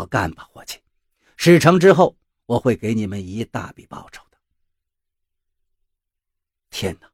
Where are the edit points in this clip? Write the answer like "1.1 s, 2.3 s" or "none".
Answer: none